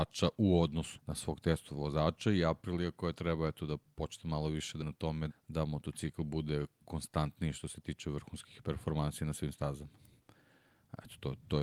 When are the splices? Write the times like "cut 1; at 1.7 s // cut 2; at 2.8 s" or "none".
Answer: cut 1; at 1.0 s // cut 2; at 4.8 s // cut 3; at 5.3 s